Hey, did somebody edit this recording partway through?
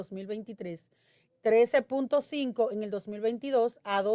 no; 0 cuts

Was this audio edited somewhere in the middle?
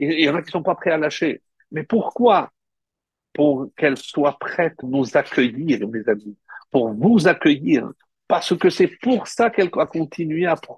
yes; 1 cut; at 4.8 s

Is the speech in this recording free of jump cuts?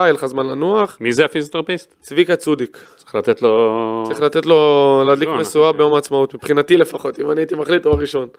yes; 0 cuts

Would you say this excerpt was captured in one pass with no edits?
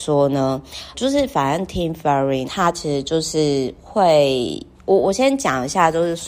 no; 2 cuts; at 0.9 s, 2.4 s

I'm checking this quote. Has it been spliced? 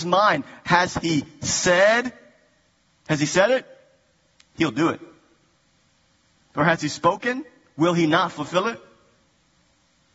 no; 0 cuts

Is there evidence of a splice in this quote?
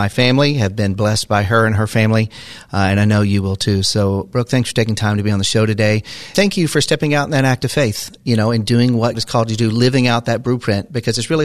yes; 2 cuts; at 6.3 s, 9.1 s

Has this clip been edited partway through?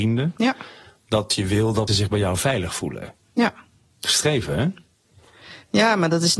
yes; 2 cuts; at 1.9 s, 4.1 s

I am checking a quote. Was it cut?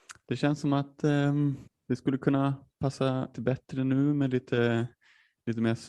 yes; 2 cuts; at 1.7 s, 3.3 s

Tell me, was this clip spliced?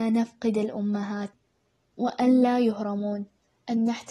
no; 0 cuts

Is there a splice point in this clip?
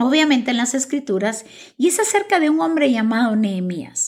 no; 0 cuts

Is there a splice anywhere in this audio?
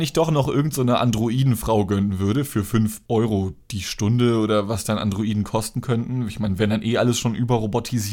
yes; 1 cut; at 3.1 s

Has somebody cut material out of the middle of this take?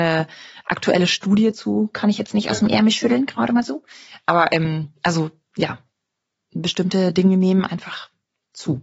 no; 0 cuts

